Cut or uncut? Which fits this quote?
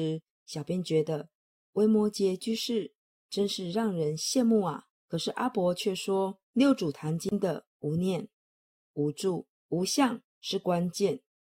cut